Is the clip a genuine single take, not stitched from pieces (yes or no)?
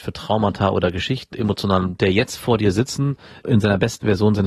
no